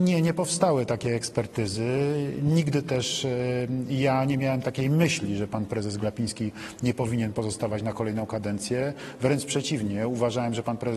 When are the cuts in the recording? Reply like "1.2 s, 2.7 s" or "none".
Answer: none